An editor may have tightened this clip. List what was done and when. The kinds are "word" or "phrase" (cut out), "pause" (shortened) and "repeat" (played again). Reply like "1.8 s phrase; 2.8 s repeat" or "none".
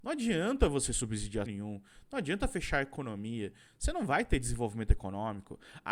1.5 s word